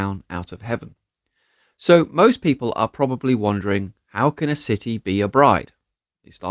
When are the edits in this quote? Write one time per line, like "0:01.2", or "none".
none

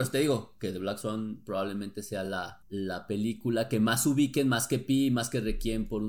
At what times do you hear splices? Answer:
none

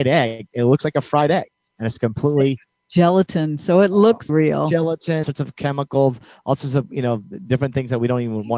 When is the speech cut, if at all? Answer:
0:04.3
0:05.2

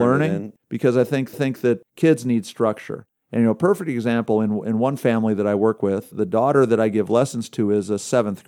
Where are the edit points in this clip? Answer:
0:01.3
0:06.1

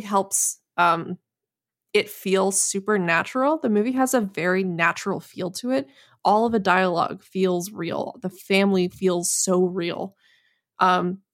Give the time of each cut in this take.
none

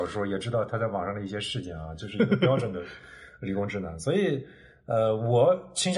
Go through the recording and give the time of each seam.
none

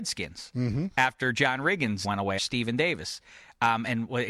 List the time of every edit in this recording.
0:02.0
0:02.4

